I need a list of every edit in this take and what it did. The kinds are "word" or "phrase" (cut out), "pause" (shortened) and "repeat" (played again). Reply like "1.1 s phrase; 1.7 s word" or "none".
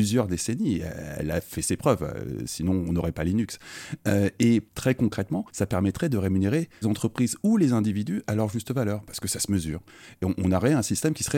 4.7 s pause; 5.5 s pause; 6.8 s phrase